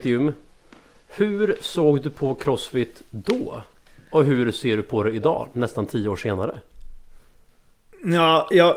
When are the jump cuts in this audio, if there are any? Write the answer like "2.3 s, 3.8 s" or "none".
none